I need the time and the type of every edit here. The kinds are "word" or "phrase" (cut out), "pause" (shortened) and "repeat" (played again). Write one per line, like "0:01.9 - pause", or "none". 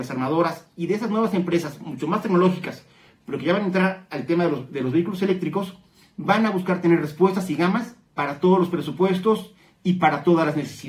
none